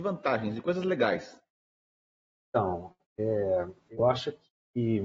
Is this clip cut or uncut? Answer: uncut